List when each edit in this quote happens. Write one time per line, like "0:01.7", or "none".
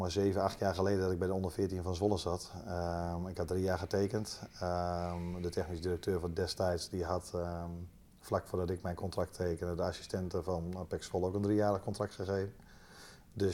none